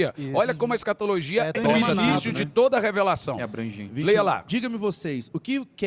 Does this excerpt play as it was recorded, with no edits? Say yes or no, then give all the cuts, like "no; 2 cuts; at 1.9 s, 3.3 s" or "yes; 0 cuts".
no; 1 cut; at 1.5 s